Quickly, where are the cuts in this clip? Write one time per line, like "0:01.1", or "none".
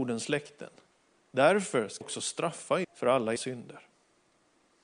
0:02.0
0:02.8
0:03.4